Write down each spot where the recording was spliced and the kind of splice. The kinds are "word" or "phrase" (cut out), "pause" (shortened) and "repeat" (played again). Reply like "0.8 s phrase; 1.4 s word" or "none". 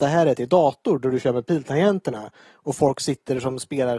none

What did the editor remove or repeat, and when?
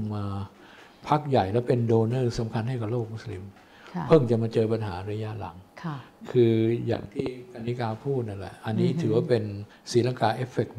9.7 s pause

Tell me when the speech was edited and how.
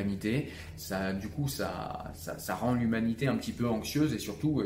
none

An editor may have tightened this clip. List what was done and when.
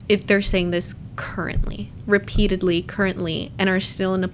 2.0 s word

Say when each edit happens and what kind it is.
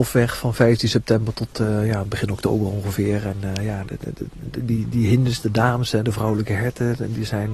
none

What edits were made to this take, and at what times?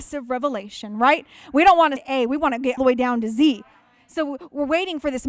2.0 s word; 2.8 s word

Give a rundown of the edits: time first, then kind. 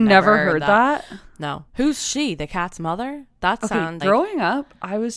1.7 s pause; 4.0 s word

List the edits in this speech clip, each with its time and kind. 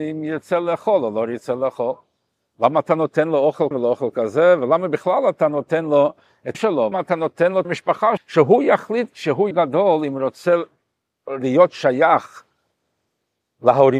3.7 s word; 6.5 s word; 6.9 s word; 7.6 s word; 8.2 s word; 9.5 s word

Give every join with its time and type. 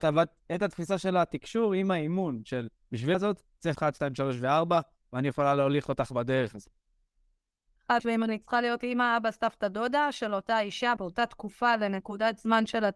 3.1 s word; 3.7 s word; 8.0 s word; 11.0 s word

